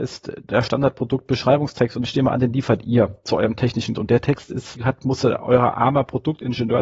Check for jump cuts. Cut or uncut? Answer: cut